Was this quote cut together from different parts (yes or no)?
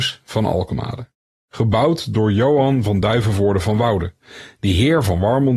no